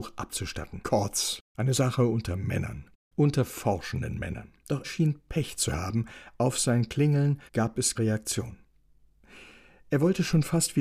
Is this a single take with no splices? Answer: no; 3 cuts; at 4.8 s, 7.5 s, 7.9 s

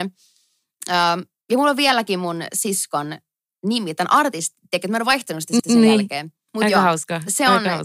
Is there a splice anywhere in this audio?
yes; 3 cuts; at 1.4 s, 5.6 s, 6.5 s

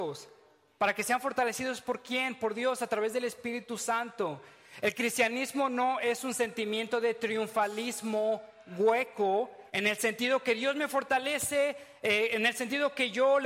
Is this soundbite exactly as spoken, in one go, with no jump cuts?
no; 1 cut; at 9.7 s

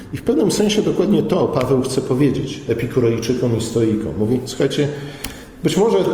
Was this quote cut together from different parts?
no; 0 cuts

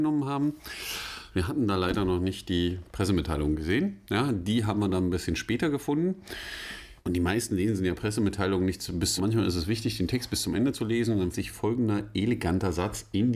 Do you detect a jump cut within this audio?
yes; 3 cuts; at 7.0 s, 9.2 s, 11.3 s

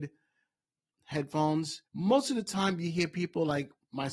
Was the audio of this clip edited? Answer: yes; 1 cut; at 1.9 s

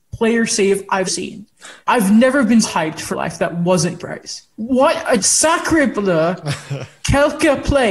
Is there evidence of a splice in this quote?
yes; 7 cuts; at 1.1 s, 1.8 s, 2.6 s, 3.1 s, 4.0 s, 4.5 s, 5.2 s

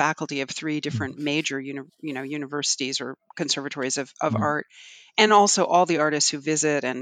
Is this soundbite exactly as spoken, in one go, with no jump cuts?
yes; 0 cuts

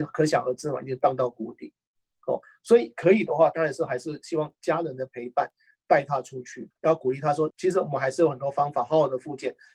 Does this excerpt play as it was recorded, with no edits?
yes; 0 cuts

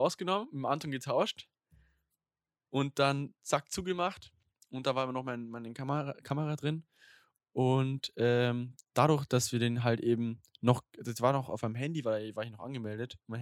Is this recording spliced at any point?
no; 0 cuts

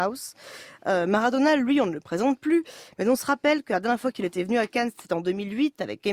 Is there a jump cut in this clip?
no; 0 cuts

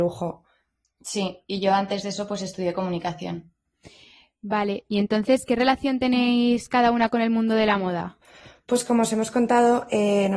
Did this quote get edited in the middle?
no; 0 cuts

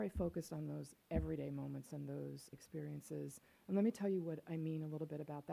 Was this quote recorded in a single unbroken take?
no; 1 cut; at 2.5 s

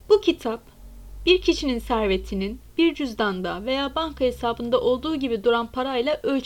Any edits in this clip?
no; 0 cuts

